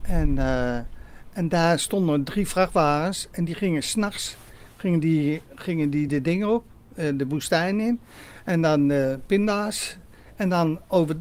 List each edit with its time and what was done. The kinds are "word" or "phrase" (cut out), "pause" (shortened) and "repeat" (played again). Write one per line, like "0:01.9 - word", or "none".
none